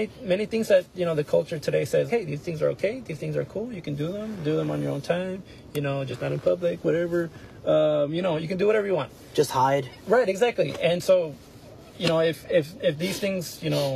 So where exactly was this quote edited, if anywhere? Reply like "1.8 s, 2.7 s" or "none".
2.1 s